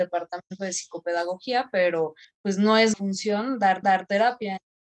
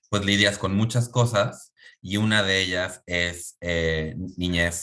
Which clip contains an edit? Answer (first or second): first